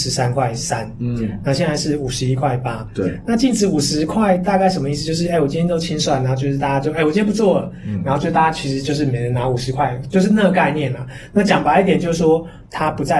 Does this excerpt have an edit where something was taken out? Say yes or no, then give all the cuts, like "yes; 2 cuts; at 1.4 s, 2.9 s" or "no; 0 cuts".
no; 0 cuts